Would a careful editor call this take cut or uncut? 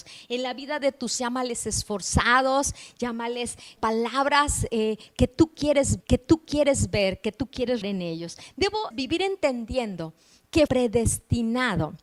cut